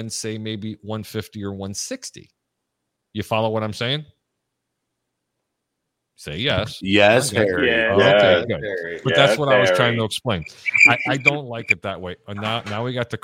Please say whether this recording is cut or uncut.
uncut